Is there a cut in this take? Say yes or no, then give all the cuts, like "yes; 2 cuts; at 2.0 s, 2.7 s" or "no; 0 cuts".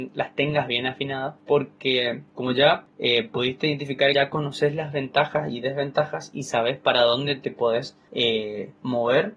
yes; 1 cut; at 4.1 s